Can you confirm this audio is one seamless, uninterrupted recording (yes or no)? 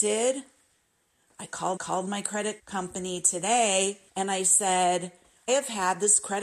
no